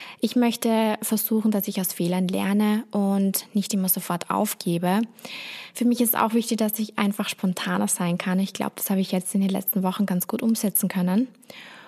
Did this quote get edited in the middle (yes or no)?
no